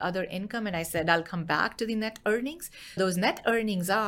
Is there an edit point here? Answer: yes; 1 cut; at 3.0 s

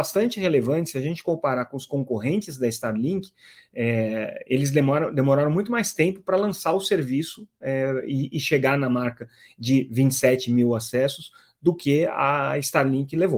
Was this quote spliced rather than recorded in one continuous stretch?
no; 0 cuts

